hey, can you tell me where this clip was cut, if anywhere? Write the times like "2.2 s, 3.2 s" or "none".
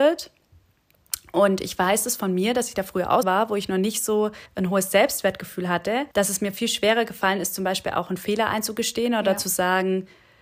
3.2 s, 4.5 s, 6.1 s